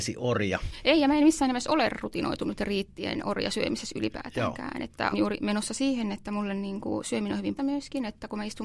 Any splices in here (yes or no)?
yes